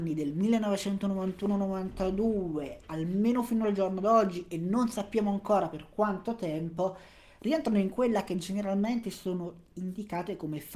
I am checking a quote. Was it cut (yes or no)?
no